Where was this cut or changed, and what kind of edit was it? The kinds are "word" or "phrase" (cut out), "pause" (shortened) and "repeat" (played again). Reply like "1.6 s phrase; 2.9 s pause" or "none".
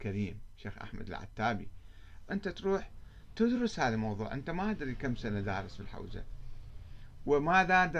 2.3 s word